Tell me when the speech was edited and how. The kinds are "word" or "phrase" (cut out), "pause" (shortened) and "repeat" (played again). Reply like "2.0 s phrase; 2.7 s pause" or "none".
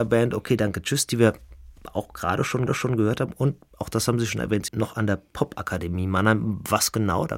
2.7 s repeat; 4.7 s word